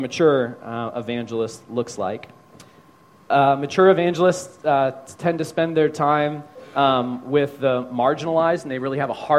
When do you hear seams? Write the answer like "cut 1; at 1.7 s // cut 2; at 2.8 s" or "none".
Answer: none